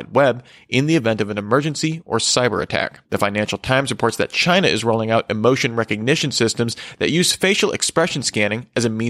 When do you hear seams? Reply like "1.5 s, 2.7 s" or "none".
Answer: 3.0 s